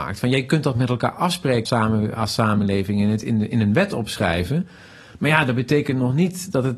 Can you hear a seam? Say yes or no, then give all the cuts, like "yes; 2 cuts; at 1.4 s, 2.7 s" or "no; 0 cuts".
yes; 1 cut; at 1.7 s